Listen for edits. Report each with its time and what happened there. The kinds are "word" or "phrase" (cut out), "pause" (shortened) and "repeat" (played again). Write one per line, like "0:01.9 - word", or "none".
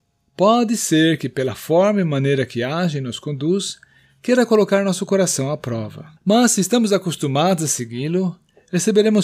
0:06.2 - pause